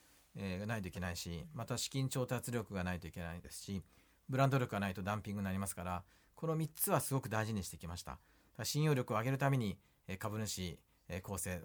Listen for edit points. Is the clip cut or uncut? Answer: uncut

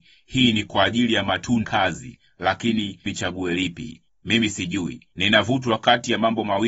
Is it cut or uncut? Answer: cut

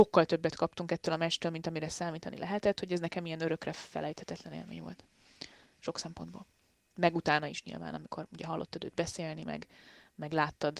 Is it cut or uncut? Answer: uncut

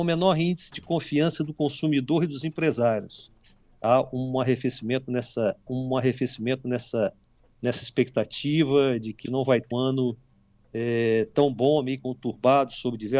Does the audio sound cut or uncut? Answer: cut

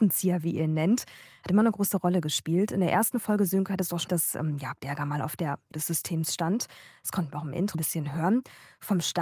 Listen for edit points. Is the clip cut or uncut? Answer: cut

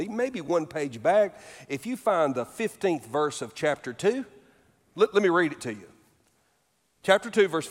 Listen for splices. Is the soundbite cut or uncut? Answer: uncut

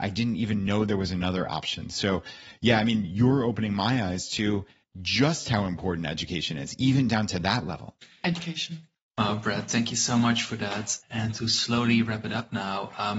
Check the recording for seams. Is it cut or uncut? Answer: uncut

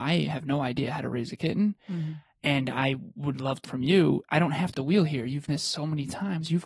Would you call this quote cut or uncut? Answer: cut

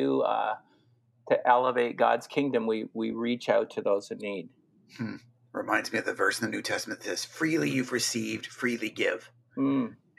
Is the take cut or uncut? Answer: uncut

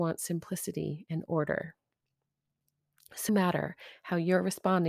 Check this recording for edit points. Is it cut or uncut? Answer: cut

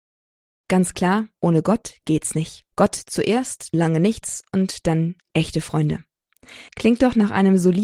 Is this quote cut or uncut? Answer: cut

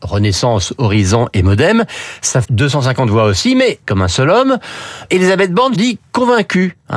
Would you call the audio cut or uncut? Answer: cut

